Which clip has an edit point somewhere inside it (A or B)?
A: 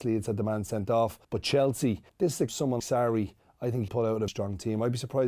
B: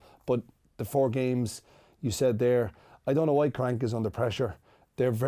A